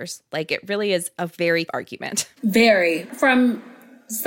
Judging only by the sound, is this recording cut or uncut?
cut